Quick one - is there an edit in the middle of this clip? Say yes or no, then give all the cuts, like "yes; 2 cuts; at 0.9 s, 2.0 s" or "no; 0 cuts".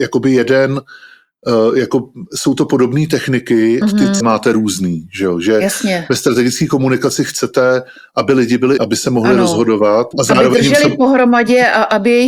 yes; 4 cuts; at 3.8 s, 4.2 s, 8.8 s, 10.1 s